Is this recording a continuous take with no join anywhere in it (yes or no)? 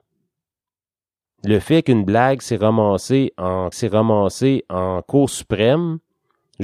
no